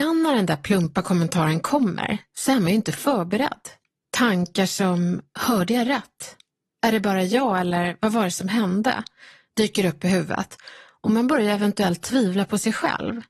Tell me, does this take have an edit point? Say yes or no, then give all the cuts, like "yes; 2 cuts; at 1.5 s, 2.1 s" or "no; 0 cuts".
no; 0 cuts